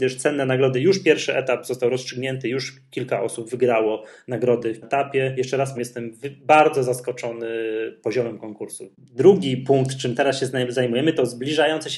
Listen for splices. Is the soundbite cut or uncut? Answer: cut